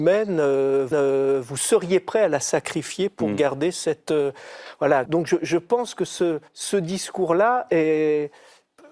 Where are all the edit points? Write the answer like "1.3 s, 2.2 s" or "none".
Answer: 0.9 s, 5.1 s, 6.5 s